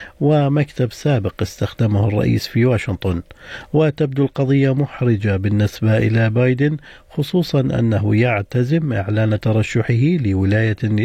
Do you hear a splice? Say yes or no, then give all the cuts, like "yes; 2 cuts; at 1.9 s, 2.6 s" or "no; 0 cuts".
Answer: no; 0 cuts